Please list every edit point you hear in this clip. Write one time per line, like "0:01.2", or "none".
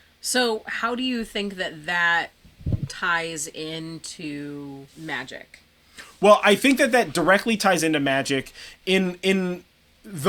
0:04.9